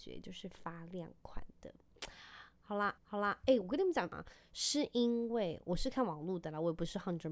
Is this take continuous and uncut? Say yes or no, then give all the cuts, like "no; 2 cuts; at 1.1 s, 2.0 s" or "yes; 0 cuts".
no; 1 cut; at 3.0 s